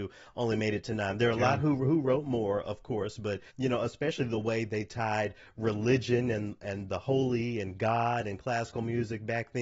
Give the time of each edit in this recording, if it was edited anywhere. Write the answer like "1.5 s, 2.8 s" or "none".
3.5 s

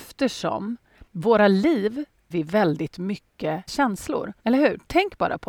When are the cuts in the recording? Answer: 1.1 s, 2.3 s, 3.7 s, 4.4 s

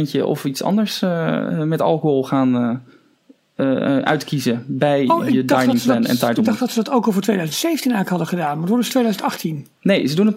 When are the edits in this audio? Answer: none

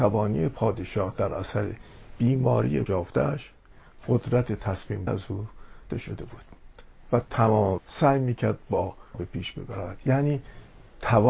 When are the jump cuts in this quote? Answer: 2.9 s, 5.1 s, 5.9 s, 7.8 s, 9.1 s

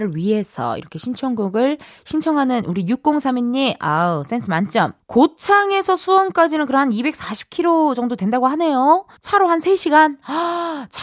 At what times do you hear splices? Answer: 5.0 s, 9.2 s

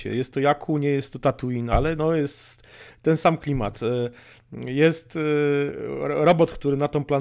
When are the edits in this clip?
none

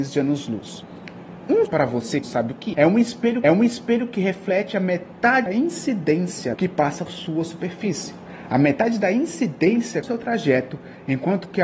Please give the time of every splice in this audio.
1.7 s, 2.2 s, 2.7 s, 3.4 s, 5.5 s, 6.5 s, 7.1 s, 10.0 s

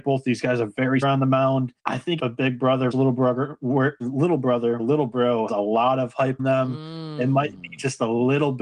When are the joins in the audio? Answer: 1.0 s, 1.8 s, 2.2 s, 2.9 s, 4.0 s, 4.8 s, 5.5 s, 6.4 s

